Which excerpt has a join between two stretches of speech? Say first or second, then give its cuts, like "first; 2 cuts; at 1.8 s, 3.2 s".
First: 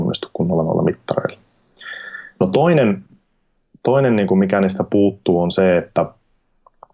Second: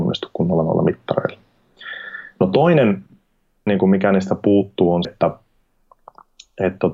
second; 2 cuts; at 3.7 s, 5.0 s